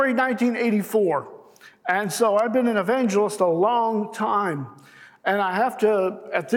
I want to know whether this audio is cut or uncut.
uncut